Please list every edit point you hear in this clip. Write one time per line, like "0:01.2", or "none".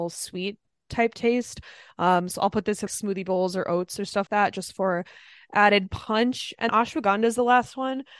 0:02.9
0:04.3
0:06.7